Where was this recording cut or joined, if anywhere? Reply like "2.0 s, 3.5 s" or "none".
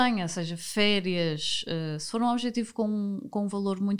none